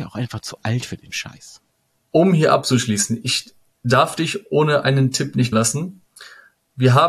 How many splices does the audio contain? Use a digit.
1